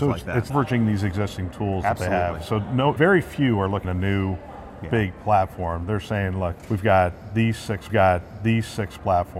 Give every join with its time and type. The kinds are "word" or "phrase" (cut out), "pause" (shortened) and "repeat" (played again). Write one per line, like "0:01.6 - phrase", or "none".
0:03.0 - word
0:03.8 - phrase
0:07.9 - repeat